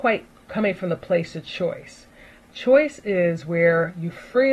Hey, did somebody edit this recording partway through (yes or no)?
no